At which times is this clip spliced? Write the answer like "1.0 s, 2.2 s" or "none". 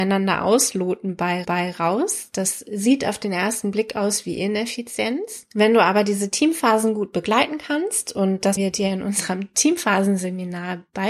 1.4 s, 8.6 s